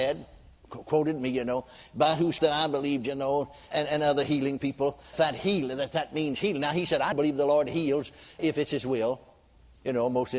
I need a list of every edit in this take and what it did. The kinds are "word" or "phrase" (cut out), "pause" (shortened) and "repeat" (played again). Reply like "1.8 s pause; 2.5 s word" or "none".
2.4 s word; 3.7 s word; 5.1 s word; 7.1 s word; 8.4 s word